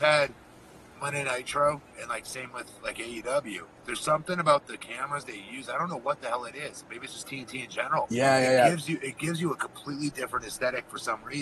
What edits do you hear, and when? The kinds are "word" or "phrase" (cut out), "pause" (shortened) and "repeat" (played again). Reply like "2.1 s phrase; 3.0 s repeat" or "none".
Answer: 3.8 s pause